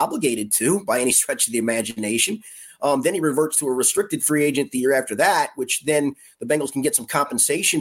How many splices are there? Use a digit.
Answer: 0